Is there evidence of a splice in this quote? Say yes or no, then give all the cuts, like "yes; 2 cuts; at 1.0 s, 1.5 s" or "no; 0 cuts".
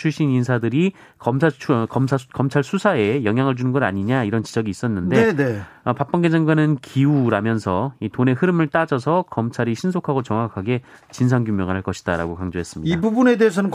no; 0 cuts